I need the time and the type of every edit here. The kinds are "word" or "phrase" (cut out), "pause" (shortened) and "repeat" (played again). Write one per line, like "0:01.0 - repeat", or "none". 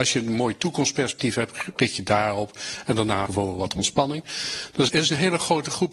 0:03.3 - word
0:04.9 - word